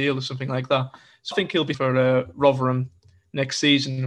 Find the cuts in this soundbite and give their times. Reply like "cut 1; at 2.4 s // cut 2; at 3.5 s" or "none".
cut 1; at 1.3 s // cut 2; at 1.7 s